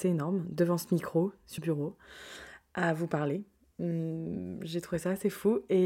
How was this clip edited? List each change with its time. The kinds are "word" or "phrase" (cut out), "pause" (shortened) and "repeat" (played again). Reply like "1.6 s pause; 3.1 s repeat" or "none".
1.6 s word